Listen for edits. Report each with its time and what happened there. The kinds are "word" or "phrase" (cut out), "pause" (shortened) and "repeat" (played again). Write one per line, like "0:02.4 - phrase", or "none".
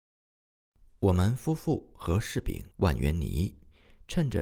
0:02.7 - pause